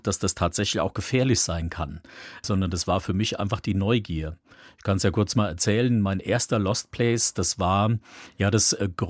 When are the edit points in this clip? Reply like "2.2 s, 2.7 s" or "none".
none